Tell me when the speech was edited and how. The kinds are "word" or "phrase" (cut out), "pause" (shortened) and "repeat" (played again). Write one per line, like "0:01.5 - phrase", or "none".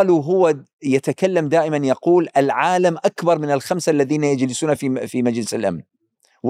none